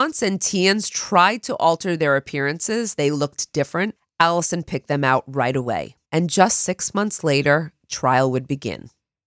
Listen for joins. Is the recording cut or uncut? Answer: cut